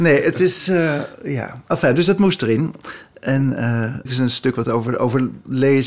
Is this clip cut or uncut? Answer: cut